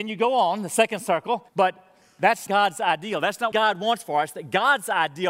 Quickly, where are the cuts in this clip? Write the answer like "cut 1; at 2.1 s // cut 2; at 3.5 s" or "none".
cut 1; at 1.5 s // cut 2; at 2.5 s // cut 3; at 3.5 s